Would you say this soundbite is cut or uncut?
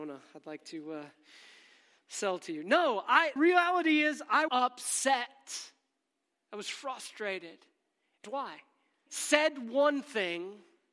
cut